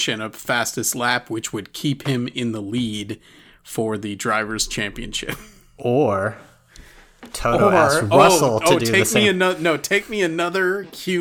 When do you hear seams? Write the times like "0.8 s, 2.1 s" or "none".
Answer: none